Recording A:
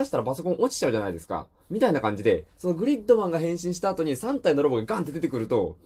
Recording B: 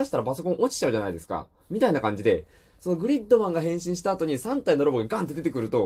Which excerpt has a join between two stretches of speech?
A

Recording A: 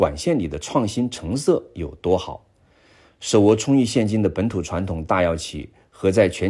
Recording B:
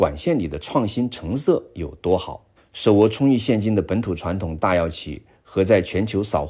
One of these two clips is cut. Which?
B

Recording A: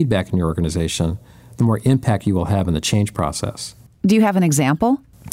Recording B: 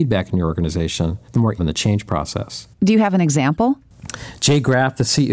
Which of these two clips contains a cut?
B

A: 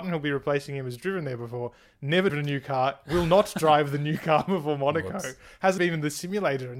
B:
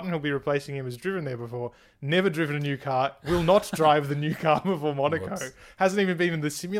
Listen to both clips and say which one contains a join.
A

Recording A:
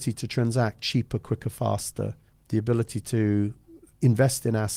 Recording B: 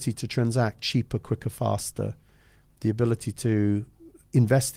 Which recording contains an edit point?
A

